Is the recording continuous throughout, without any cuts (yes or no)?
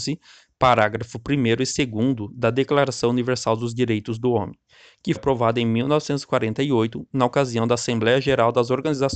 no